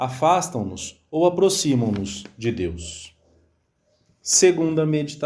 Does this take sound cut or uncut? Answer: uncut